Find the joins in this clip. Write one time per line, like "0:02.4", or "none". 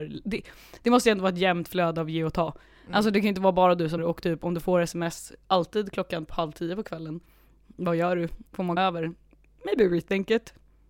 0:04.0
0:06.3
0:08.5
0:08.8